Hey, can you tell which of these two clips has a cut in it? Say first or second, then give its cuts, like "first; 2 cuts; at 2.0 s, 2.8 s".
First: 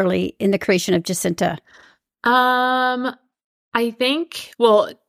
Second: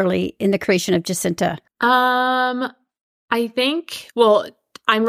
second; 1 cut; at 1.7 s